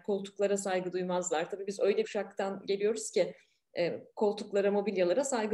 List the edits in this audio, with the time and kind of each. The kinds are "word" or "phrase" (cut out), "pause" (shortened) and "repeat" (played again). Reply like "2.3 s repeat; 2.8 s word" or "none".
2.0 s word